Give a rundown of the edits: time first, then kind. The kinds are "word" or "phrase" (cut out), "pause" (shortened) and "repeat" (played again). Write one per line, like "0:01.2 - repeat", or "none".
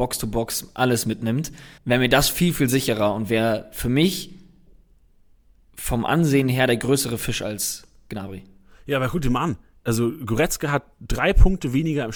0:01.8 - pause